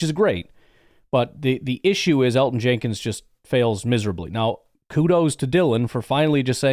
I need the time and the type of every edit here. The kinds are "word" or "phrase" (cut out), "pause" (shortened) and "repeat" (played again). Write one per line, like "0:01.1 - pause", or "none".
none